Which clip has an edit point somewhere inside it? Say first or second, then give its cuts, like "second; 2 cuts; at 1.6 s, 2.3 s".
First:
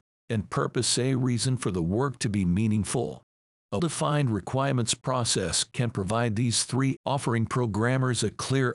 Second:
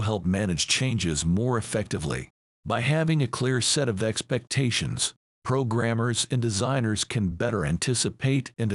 first; 2 cuts; at 3.8 s, 7.0 s